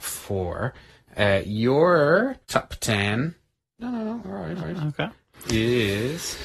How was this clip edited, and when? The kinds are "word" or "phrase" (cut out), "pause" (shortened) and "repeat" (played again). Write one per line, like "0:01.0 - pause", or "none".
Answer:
0:02.4 - pause
0:04.6 - repeat